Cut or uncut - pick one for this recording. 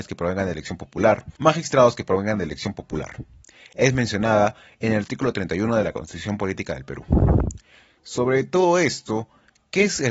cut